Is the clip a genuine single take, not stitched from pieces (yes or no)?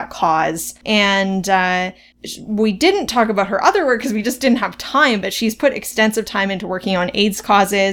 yes